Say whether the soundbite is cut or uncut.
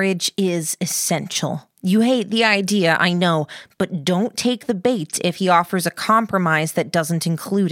cut